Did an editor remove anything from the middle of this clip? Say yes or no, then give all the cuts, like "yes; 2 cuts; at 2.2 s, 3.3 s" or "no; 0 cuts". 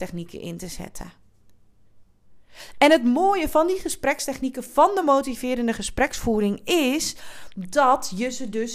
no; 0 cuts